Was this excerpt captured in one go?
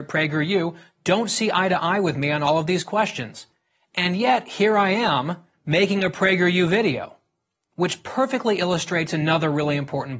yes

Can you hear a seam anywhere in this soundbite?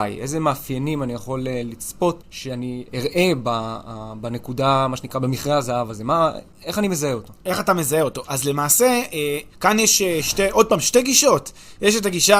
yes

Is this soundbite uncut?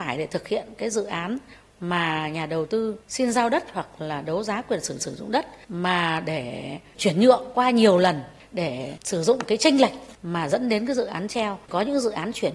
no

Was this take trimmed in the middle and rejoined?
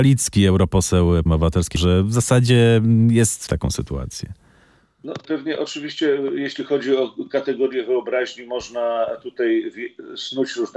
yes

